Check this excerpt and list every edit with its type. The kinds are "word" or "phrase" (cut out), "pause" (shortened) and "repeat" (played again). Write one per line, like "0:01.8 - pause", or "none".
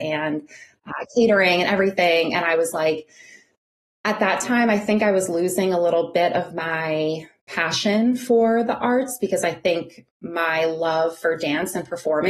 none